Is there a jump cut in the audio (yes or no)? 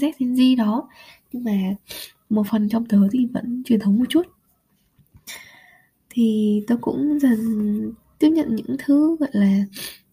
no